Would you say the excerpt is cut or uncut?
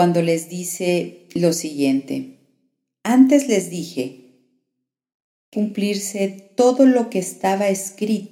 cut